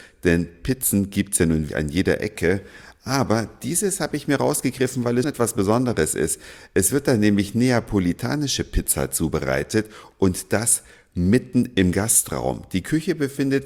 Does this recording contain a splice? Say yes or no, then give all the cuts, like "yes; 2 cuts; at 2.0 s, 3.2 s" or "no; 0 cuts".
yes; 2 cuts; at 1.7 s, 5.2 s